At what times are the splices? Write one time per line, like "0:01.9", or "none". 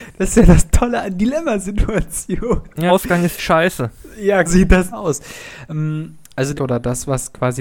0:02.9
0:03.4
0:04.5
0:04.9
0:06.6